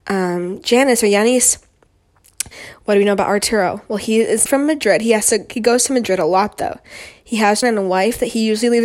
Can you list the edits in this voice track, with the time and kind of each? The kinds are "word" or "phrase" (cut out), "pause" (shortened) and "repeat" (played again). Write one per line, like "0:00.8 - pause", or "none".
0:04.5 - word
0:07.6 - word

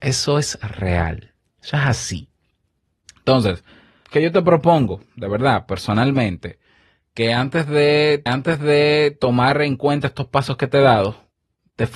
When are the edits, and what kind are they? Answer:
0:04.0 - word
0:08.3 - repeat

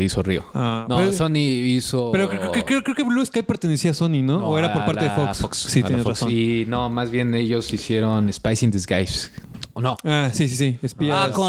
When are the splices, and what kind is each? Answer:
none

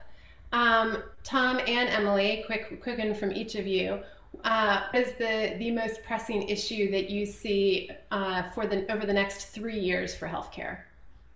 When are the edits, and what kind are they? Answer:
0:04.9 - word

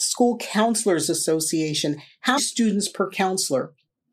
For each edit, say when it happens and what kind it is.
0:02.4 - word

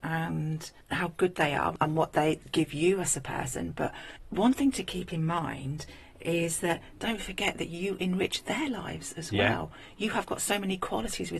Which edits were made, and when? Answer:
none

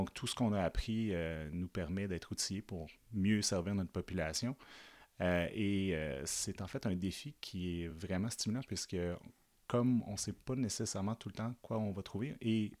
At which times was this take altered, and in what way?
none

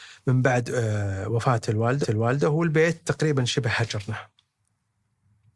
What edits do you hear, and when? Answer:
0:02.0 - repeat

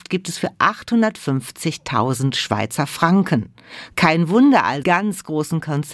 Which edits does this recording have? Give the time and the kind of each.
0:04.8 - phrase

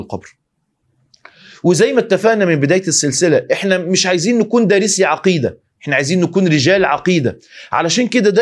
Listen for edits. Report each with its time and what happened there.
none

